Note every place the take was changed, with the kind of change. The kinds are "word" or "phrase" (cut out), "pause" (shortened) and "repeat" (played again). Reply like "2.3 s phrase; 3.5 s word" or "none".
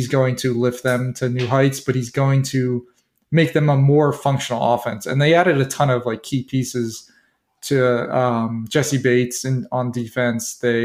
none